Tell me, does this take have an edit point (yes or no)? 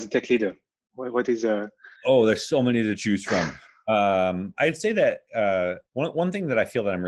yes